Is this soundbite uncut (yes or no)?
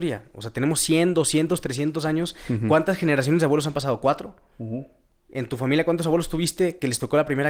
yes